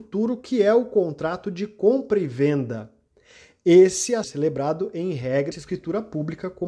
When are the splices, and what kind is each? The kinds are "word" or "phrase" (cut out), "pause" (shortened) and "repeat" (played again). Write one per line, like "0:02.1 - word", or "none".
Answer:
0:04.2 - word
0:05.5 - word